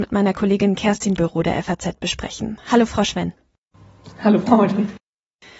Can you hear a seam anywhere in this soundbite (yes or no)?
yes